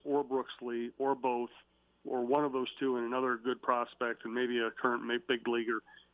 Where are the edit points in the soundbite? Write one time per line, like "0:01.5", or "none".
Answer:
none